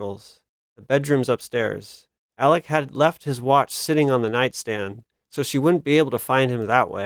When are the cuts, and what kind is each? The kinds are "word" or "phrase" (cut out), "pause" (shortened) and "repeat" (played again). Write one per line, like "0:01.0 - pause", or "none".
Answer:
none

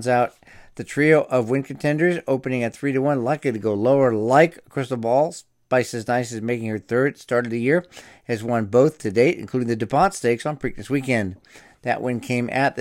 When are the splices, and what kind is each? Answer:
none

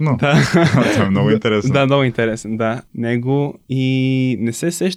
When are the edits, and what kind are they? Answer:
none

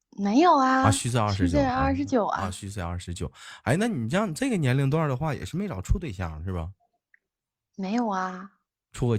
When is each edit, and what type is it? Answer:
none

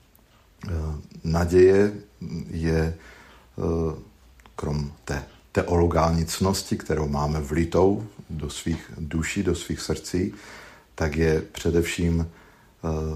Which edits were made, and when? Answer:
none

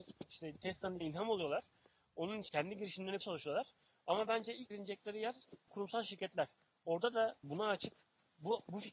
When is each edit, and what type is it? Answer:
0:01.0 - word
0:02.5 - word
0:03.2 - word
0:04.7 - word
0:05.7 - word
0:07.4 - word

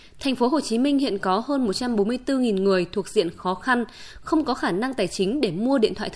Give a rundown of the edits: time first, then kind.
none

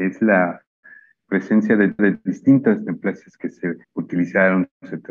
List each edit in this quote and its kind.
0:02.0 - repeat
0:03.8 - pause

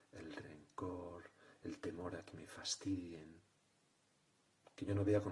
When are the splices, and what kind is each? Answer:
none

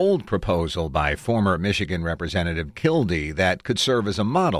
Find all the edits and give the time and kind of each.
0:02.7 - word

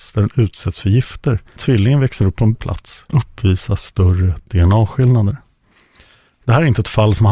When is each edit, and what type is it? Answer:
0:01.6 - word
0:02.5 - word
0:03.1 - word

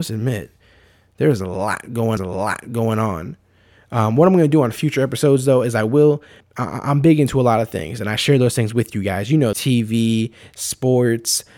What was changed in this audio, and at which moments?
0:02.2 - repeat
0:06.4 - word
0:09.5 - phrase

